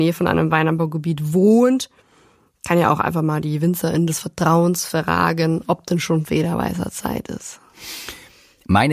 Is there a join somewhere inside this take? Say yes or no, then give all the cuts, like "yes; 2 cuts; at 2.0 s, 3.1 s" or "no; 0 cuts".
no; 0 cuts